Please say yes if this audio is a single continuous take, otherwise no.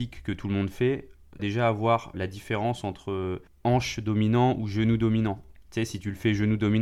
no